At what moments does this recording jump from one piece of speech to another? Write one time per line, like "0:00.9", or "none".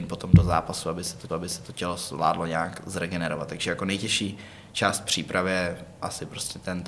0:01.3